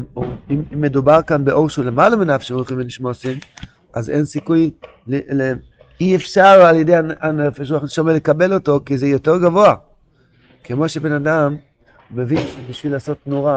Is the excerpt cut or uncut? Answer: uncut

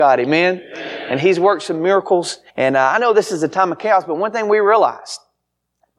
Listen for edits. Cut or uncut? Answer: cut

